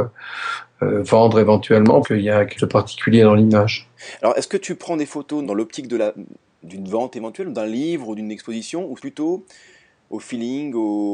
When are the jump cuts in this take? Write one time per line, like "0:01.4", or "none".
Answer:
0:02.0
0:02.6
0:05.4
0:09.0